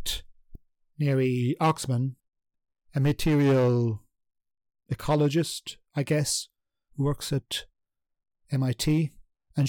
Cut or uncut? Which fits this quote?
uncut